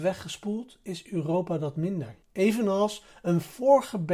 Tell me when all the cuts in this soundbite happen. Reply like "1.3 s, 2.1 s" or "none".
2.2 s